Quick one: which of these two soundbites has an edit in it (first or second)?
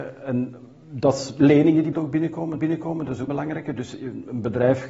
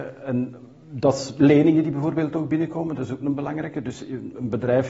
first